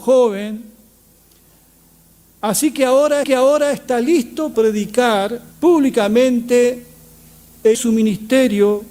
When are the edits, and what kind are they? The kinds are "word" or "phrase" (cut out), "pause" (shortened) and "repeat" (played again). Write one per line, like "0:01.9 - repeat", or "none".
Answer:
0:03.2 - repeat
0:04.5 - word
0:05.5 - pause
0:07.7 - word